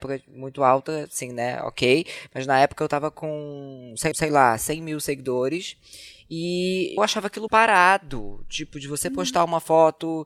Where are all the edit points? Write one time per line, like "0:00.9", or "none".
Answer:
0:04.1
0:07.0
0:07.5